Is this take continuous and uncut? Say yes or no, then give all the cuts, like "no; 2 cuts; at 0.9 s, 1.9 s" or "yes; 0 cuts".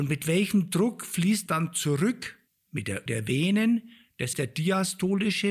no; 4 cuts; at 1.5 s, 2.5 s, 3.1 s, 4.3 s